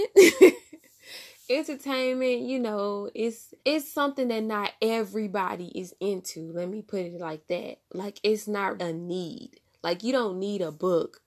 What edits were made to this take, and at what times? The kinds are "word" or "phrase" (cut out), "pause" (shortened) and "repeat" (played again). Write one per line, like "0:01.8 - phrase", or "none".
0:03.6 - pause
0:08.8 - word